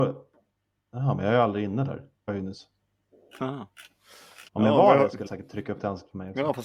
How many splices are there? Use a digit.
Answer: 3